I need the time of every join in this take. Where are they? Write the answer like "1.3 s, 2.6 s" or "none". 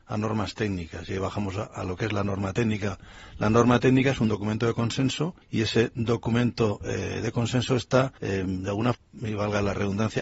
5.4 s, 8.2 s, 8.9 s